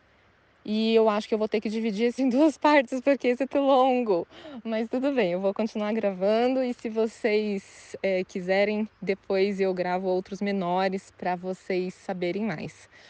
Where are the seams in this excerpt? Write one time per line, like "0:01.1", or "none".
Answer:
0:02.2
0:03.5